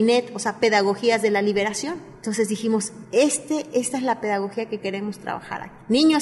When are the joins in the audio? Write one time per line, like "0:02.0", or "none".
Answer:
none